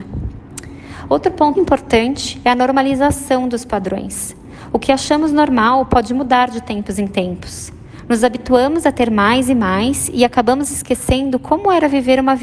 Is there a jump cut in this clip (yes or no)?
yes